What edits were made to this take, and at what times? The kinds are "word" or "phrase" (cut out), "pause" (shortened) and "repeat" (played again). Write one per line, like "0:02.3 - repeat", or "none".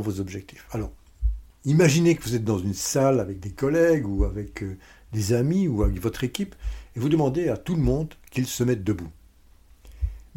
none